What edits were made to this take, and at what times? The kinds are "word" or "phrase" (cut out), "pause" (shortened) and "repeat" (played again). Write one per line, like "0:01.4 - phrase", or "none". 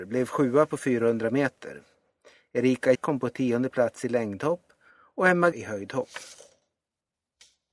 0:02.9 - word
0:05.5 - phrase